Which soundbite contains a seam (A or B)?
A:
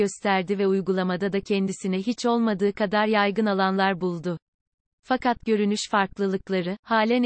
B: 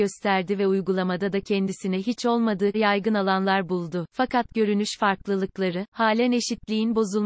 B